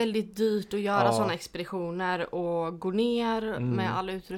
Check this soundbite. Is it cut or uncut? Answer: uncut